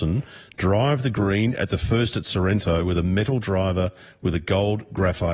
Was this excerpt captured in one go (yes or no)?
yes